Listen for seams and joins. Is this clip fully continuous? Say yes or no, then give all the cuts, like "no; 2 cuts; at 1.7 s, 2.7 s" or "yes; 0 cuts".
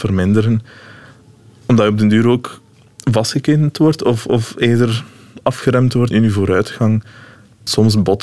no; 1 cut; at 6.1 s